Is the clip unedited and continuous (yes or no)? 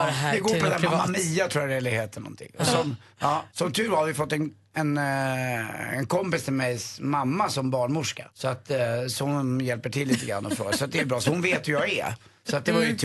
no